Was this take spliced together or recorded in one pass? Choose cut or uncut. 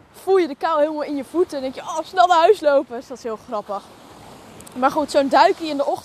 uncut